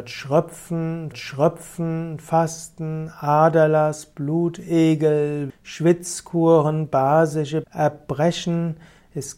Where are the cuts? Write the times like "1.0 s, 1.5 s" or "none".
1.1 s, 5.5 s, 7.6 s